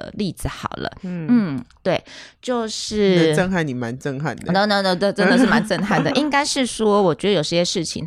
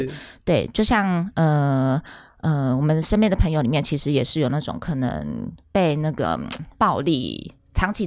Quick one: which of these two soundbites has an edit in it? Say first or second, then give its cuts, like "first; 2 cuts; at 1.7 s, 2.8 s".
second; 1 cut; at 6.7 s